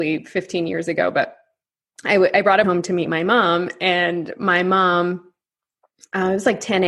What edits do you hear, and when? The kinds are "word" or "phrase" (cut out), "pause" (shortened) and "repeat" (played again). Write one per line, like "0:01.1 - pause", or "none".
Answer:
0:02.6 - word